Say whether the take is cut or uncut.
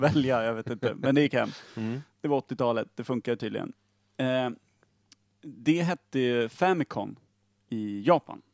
cut